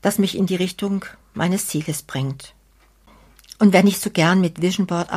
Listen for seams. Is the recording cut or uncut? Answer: uncut